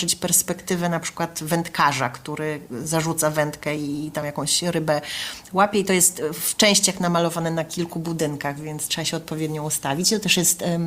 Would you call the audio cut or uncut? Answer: uncut